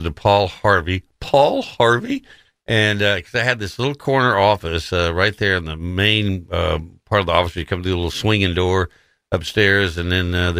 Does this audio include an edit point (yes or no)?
no